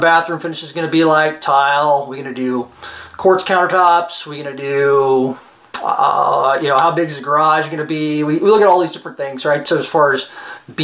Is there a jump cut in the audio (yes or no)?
no